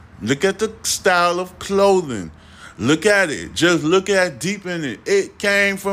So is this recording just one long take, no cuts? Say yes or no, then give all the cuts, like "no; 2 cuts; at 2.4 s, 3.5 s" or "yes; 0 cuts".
yes; 0 cuts